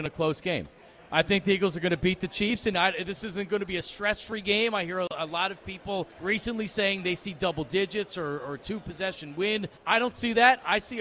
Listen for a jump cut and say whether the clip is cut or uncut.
cut